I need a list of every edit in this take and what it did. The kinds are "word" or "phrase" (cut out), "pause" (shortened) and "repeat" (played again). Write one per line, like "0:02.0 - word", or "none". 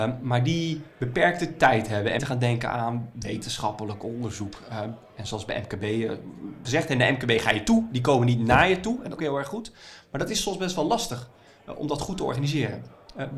0:02.2 - phrase
0:06.7 - phrase
0:09.2 - phrase